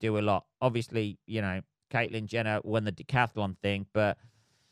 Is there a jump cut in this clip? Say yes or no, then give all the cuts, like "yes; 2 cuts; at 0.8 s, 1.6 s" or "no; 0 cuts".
no; 0 cuts